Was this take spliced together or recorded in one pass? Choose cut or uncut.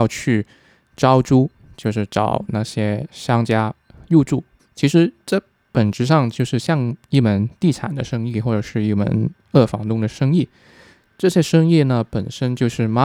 cut